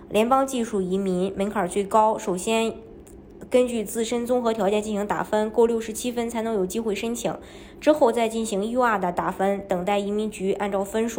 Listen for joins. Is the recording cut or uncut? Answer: uncut